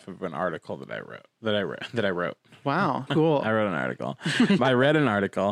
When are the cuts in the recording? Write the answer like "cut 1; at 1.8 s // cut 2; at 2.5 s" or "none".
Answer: cut 1; at 3.1 s // cut 2; at 4.6 s